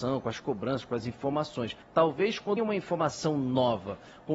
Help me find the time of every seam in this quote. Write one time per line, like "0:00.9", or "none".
0:01.8
0:02.6

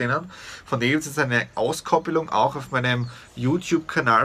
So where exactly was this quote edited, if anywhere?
none

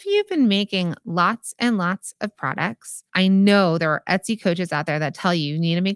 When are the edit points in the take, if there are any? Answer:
0:03.1

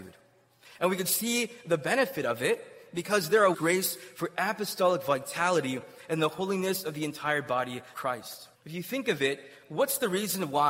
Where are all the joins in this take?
0:03.5
0:07.9
0:08.5

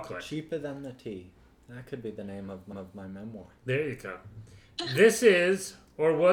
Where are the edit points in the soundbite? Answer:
0:02.7

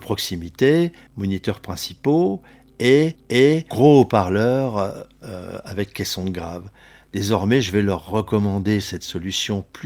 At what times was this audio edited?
0:03.2

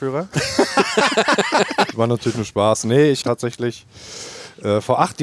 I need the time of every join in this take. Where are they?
0:01.9
0:03.2

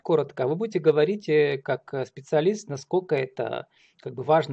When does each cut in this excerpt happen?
none

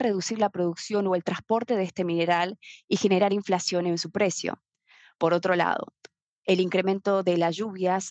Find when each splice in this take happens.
none

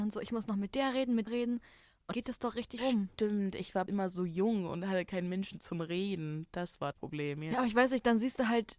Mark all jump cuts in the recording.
0:01.3
0:02.1
0:02.8
0:03.9
0:06.9

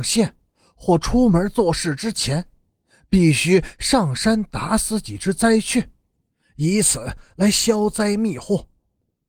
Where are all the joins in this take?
none

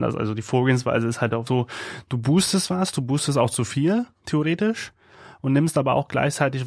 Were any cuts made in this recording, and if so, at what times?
0:01.5

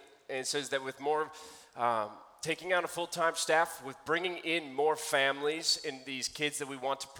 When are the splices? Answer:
none

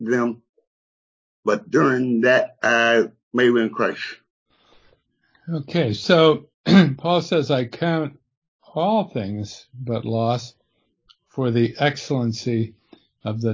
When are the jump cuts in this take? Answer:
none

